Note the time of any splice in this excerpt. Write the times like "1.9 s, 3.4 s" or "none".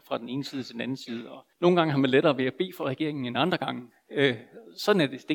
1.5 s